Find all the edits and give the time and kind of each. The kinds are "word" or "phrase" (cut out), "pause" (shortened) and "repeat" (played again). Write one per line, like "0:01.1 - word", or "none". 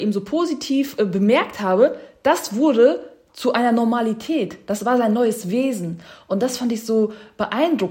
none